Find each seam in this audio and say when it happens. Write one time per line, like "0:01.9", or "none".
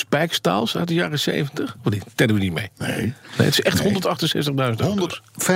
none